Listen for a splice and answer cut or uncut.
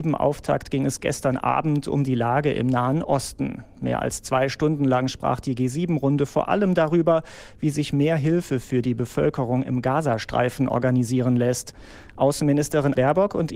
uncut